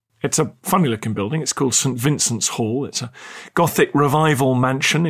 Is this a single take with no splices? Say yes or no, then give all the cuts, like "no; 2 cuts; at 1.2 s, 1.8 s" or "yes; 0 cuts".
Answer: yes; 0 cuts